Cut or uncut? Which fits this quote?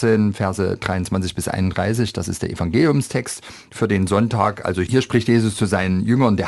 uncut